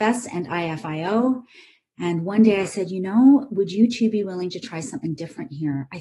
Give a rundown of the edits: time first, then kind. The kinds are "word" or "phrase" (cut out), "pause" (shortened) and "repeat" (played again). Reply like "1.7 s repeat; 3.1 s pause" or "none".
none